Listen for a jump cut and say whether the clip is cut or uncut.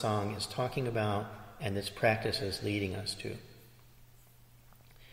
uncut